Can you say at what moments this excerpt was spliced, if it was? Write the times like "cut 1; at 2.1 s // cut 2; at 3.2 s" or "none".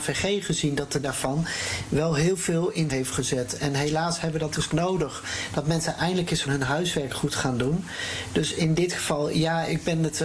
cut 1; at 1.0 s // cut 2; at 2.9 s // cut 3; at 4.7 s // cut 4; at 6.4 s